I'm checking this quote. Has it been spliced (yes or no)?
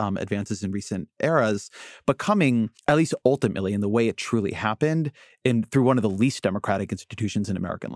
yes